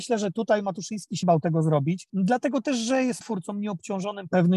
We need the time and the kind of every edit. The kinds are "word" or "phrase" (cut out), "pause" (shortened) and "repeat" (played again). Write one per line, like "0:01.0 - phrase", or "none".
0:01.2 - word
0:03.2 - word